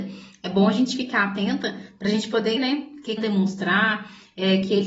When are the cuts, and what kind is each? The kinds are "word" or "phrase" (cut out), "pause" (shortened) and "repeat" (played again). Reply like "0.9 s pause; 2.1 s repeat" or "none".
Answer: 2.6 s word; 3.2 s phrase